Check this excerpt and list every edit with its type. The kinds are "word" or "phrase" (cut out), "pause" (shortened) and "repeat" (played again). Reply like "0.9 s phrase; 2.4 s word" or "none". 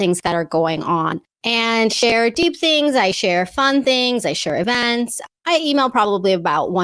1.9 s word